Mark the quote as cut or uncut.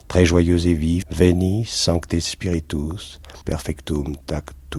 cut